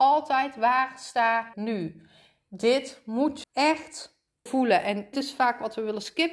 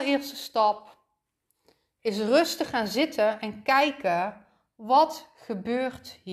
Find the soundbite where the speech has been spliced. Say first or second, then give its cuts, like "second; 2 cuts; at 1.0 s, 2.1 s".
first; 4 cuts; at 1.5 s, 3.4 s, 4.5 s, 5.1 s